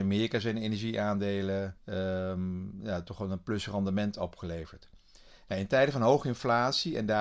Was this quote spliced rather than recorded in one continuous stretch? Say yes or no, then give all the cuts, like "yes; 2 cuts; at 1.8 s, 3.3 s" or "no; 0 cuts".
yes; 1 cut; at 1.8 s